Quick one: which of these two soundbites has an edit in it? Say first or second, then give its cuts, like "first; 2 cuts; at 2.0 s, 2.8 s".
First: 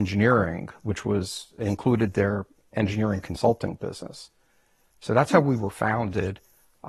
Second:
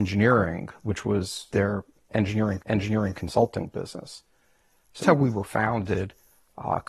second; 3 cuts; at 1.5 s, 2.6 s, 5.0 s